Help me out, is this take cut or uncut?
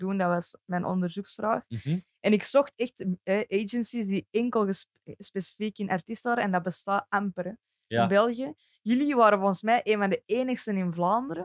uncut